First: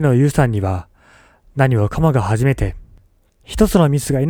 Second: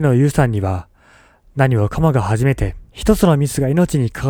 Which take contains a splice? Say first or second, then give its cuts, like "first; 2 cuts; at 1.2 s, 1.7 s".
second; 1 cut; at 2.9 s